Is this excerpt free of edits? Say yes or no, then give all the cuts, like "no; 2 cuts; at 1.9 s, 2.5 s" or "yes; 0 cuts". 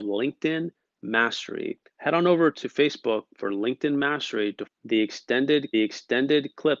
no; 3 cuts; at 1.9 s, 4.7 s, 5.7 s